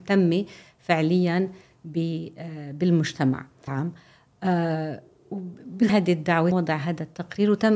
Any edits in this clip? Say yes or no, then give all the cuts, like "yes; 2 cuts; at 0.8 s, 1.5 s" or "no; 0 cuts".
yes; 3 cuts; at 3.7 s, 5.9 s, 6.5 s